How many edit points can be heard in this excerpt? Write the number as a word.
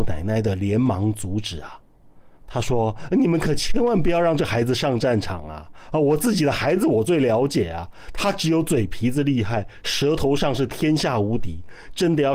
zero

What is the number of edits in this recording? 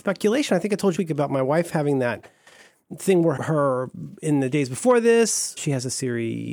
three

